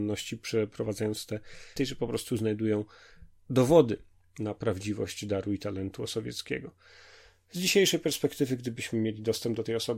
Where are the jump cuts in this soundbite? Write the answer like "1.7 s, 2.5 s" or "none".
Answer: 1.8 s